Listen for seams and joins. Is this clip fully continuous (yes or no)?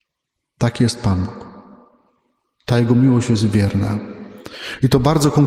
yes